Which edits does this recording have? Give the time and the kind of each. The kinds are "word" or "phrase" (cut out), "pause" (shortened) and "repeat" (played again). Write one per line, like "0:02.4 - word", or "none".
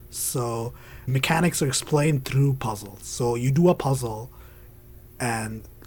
0:01.1 - word